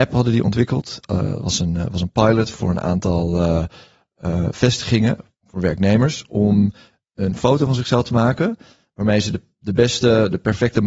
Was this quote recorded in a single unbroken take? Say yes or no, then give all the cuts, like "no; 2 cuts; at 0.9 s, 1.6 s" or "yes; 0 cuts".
yes; 0 cuts